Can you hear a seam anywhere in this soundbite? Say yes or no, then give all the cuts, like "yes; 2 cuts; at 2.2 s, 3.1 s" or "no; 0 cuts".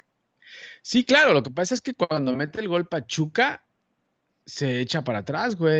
no; 0 cuts